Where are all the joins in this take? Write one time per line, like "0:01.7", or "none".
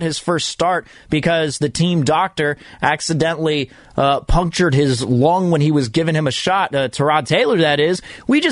none